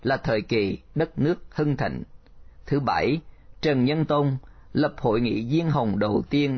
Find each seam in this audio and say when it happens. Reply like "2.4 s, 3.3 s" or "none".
none